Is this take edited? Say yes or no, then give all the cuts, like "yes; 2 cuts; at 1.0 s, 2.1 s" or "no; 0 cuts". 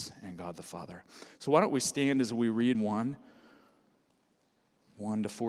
yes; 1 cut; at 2.7 s